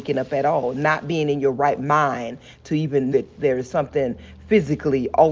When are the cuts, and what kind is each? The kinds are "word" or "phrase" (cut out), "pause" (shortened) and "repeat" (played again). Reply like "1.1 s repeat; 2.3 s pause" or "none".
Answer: 3.1 s word